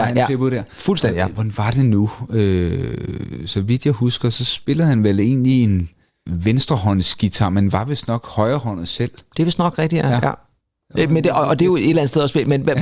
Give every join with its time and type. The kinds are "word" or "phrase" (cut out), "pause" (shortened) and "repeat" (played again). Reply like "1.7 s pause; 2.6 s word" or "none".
none